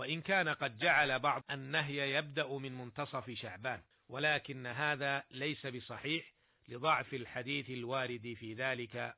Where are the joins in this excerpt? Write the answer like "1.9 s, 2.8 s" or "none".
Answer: 1.4 s, 3.9 s